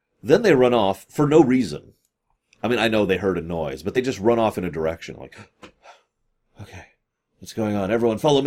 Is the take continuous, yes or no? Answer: yes